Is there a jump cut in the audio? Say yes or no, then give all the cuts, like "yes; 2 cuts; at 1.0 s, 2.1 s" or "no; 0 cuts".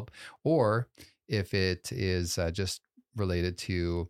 no; 0 cuts